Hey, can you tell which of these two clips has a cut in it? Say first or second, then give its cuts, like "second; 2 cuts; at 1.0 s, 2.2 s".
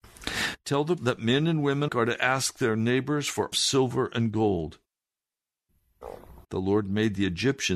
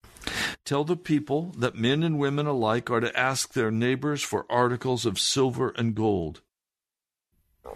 first; 4 cuts; at 1.0 s, 1.9 s, 3.5 s, 6.4 s